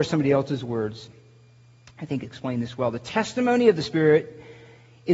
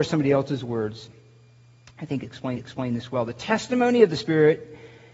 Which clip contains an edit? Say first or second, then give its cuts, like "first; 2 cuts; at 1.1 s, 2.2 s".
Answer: second; 1 cut; at 2.5 s